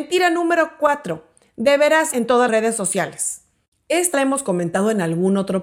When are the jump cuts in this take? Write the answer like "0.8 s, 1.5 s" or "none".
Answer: 2.1 s, 2.5 s, 4.1 s